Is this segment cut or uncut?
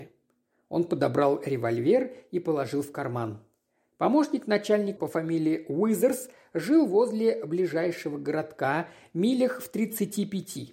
cut